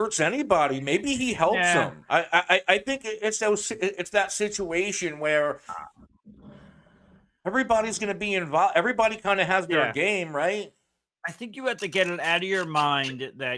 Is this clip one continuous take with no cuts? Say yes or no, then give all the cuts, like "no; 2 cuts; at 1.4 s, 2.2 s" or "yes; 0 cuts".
yes; 0 cuts